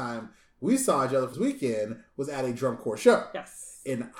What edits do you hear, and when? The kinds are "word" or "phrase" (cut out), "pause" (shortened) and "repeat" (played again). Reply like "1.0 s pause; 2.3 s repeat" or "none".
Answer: 1.3 s word